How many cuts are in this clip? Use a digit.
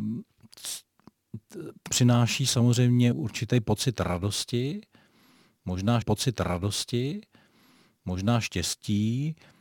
3